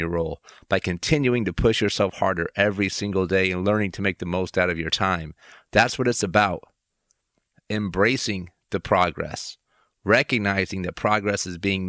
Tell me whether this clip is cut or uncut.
uncut